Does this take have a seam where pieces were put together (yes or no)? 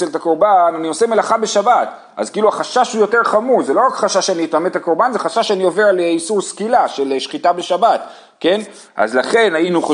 no